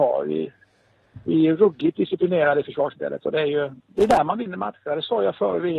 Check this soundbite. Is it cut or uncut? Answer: uncut